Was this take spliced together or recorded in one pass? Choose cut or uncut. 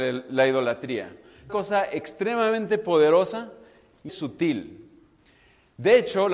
cut